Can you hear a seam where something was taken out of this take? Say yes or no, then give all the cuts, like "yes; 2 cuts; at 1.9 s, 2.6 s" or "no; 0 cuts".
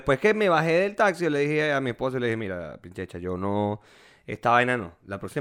no; 0 cuts